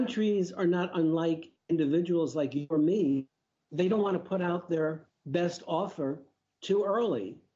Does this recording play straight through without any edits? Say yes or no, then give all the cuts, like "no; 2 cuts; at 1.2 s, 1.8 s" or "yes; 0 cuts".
yes; 0 cuts